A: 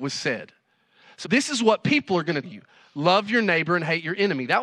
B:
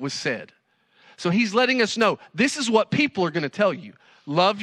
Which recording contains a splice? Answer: A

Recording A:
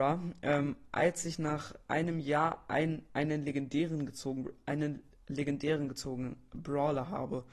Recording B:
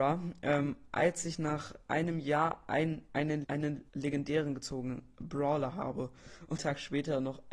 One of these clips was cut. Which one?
B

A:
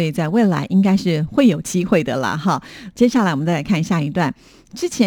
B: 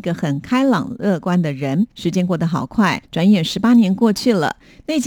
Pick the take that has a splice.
B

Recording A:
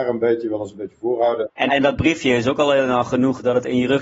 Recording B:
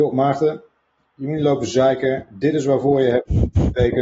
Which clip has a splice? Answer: A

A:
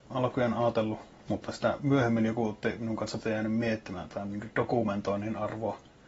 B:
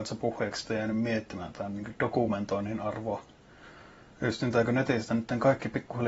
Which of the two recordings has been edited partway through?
A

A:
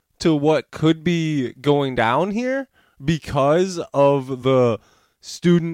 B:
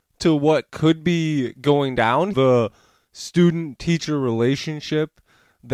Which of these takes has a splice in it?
B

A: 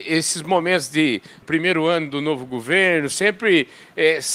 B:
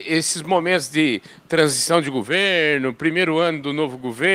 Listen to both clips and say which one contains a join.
A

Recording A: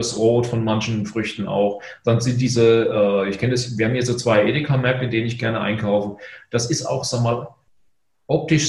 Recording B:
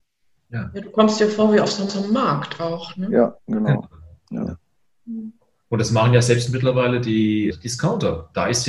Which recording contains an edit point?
B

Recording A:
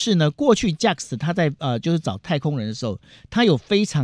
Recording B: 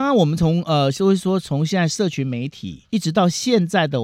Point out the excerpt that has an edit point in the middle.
B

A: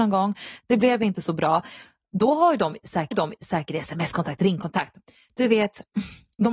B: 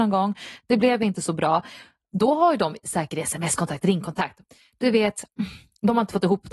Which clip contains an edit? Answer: A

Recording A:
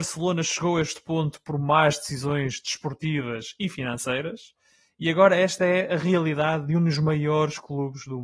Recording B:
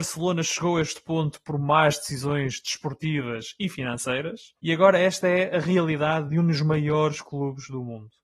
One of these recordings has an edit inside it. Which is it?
B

